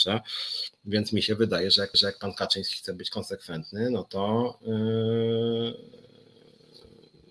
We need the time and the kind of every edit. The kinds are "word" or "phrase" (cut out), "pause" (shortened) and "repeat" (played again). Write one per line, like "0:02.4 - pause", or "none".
0:01.9 - repeat